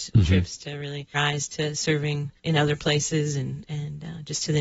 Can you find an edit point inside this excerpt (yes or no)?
yes